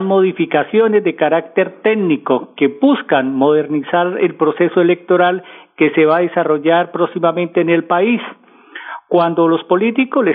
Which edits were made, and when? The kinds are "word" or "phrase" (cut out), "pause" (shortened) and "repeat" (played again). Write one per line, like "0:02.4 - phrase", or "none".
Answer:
none